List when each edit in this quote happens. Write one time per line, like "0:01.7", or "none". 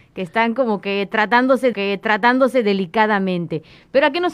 0:01.7